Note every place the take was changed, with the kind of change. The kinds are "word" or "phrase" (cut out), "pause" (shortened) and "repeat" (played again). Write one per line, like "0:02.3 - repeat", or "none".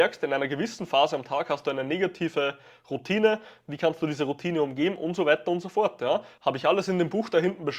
none